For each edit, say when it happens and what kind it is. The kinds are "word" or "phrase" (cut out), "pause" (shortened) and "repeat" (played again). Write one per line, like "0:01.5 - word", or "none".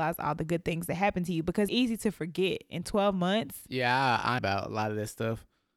0:01.7 - word
0:04.4 - phrase